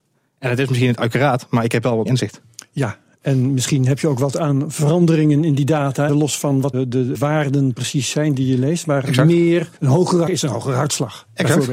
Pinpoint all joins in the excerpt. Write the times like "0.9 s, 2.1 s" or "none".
2.1 s, 6.1 s, 6.7 s, 7.1 s, 9.8 s, 10.3 s